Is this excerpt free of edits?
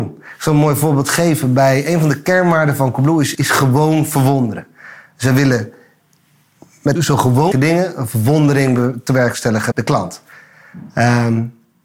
no; 4 cuts; at 3.3 s, 7.0 s, 7.5 s, 9.7 s

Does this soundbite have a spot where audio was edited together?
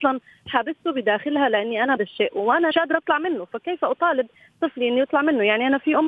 yes; 2 cuts; at 2.0 s, 2.7 s

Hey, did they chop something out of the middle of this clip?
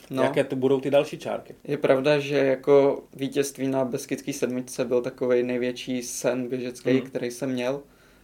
yes; 2 cuts; at 1.6 s, 3.1 s

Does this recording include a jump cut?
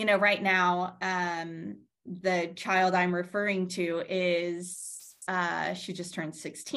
no; 0 cuts

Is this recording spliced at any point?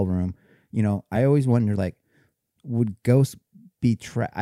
no; 0 cuts

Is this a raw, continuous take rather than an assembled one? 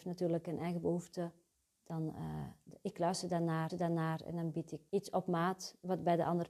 no; 3 cuts; at 1.5 s, 3.7 s, 4.9 s

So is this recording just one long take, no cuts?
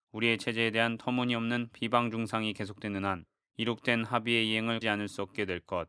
no; 1 cut; at 4.8 s

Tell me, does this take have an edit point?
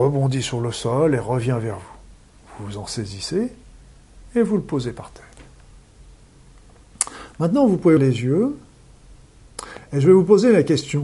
yes; 1 cut; at 8.0 s

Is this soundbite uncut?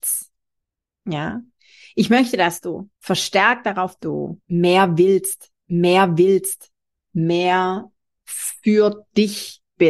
no; 3 cuts; at 3.0 s, 4.0 s, 5.6 s

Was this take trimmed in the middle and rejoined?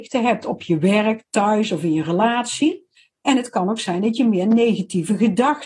yes; 1 cut; at 3.0 s

